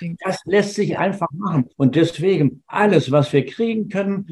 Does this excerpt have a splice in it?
yes; 1 cut; at 1.7 s

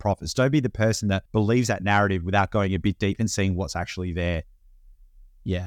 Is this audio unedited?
no; 1 cut; at 1.3 s

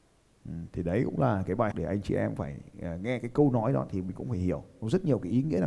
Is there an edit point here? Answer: yes; 2 cuts; at 1.7 s, 2.4 s

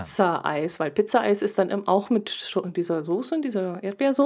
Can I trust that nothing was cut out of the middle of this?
yes; 0 cuts

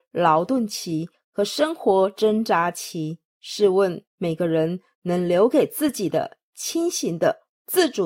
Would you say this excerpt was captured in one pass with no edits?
no; 2 cuts; at 3.3 s, 4.1 s

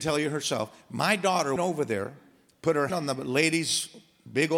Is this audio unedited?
no; 2 cuts; at 1.6 s, 2.9 s

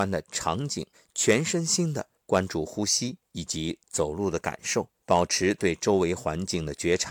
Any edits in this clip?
yes; 5 cuts; at 0.9 s, 2.2 s, 3.2 s, 3.8 s, 4.9 s

